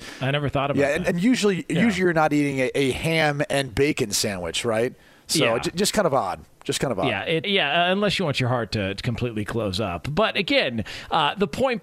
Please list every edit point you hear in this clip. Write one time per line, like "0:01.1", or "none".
0:07.4

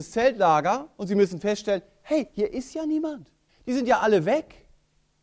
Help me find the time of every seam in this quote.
0:03.5

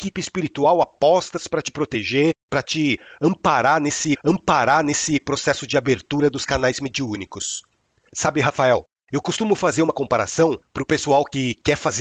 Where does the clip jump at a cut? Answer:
0:02.4
0:04.2

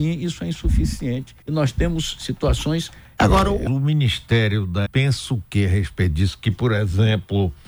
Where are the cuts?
0:01.4
0:03.2
0:03.7
0:04.9

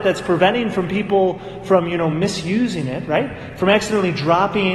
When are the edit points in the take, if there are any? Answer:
none

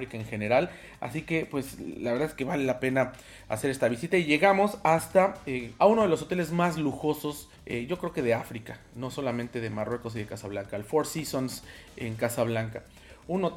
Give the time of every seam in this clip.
0:05.8
0:07.5

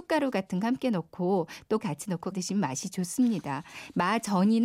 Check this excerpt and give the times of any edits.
0:01.8
0:02.3

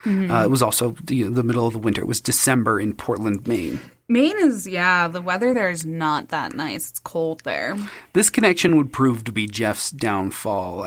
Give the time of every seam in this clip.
none

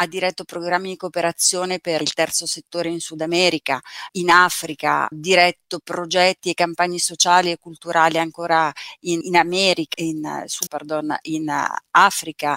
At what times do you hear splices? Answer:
0:02.0
0:04.1
0:05.1
0:09.2
0:09.9
0:10.7

